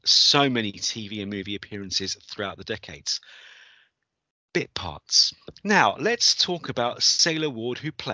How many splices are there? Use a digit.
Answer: 0